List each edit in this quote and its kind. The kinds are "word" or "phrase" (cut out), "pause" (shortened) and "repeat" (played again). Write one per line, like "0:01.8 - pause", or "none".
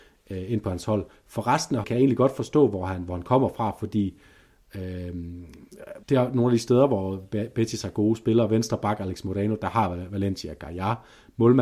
0:01.8 - word
0:06.0 - pause